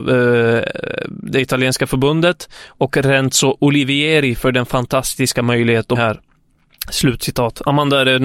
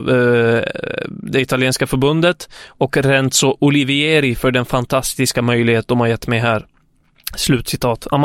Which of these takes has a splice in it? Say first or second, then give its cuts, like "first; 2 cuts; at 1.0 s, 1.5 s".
first; 1 cut; at 5.9 s